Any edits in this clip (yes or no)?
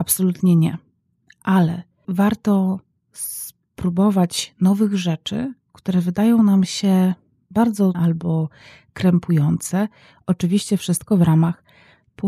yes